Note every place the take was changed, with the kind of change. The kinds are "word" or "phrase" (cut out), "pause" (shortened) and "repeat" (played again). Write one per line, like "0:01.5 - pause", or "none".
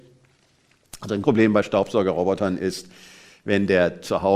0:01.2 - word